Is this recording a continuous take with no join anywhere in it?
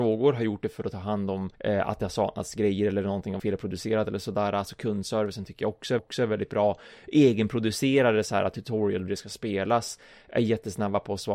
no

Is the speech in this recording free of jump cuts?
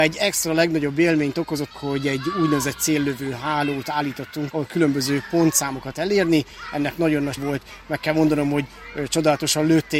no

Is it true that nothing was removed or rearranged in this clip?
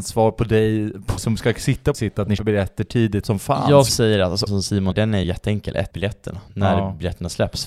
no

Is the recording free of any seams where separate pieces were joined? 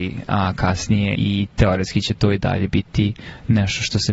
no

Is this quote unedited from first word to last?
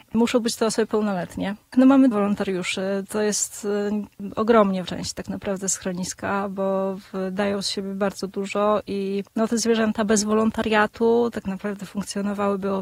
no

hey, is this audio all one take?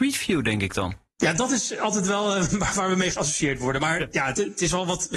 yes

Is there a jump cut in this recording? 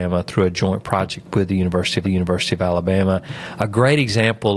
yes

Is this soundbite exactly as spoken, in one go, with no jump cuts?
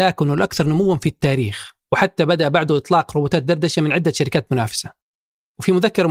yes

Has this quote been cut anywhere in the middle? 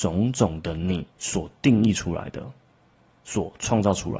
yes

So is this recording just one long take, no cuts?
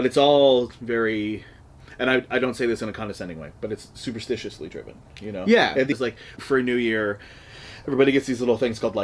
no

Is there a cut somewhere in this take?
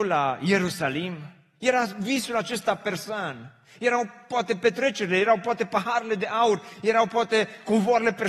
no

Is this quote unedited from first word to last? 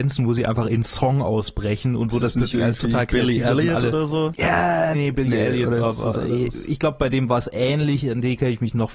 no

